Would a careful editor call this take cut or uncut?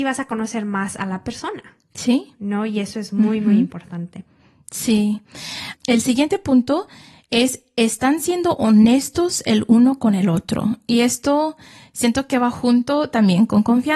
uncut